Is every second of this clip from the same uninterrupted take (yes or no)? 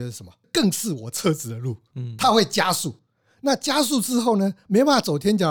yes